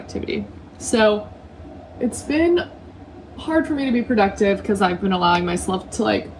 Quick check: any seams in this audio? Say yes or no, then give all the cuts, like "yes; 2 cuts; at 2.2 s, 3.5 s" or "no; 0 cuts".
no; 0 cuts